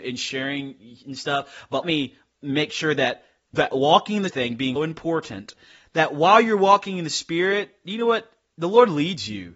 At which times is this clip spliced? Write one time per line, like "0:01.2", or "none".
0:01.8
0:03.5
0:04.3
0:04.8